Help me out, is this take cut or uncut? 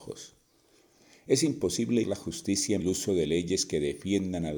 cut